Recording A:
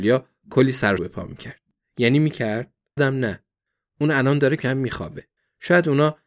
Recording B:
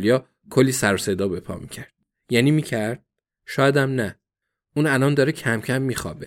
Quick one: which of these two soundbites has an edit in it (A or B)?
A